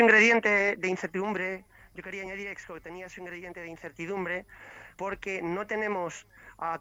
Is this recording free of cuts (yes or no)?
yes